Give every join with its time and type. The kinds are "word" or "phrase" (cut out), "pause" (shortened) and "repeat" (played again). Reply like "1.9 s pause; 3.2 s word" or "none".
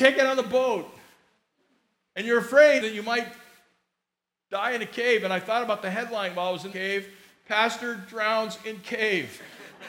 2.8 s word; 6.7 s word